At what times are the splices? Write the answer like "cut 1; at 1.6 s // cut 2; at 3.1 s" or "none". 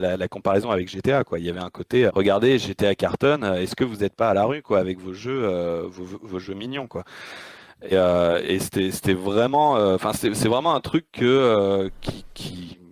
cut 1; at 2.1 s // cut 2; at 7.9 s